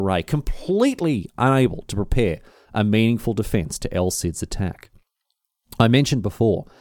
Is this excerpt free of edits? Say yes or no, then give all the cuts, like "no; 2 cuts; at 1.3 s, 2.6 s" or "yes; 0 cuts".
yes; 0 cuts